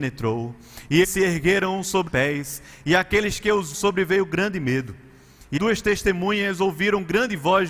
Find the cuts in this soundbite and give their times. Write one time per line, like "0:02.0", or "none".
0:01.0
0:02.1
0:03.7
0:05.6